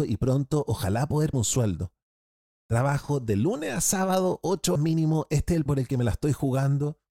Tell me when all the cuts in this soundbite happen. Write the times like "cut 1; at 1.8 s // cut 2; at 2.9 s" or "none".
cut 1; at 1.3 s // cut 2; at 4.8 s // cut 3; at 5.7 s